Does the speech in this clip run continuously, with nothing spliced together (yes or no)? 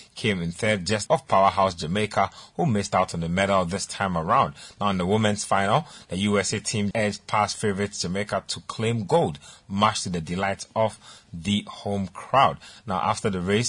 no